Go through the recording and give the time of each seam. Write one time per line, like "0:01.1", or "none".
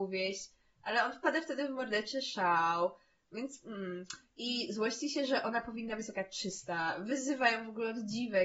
none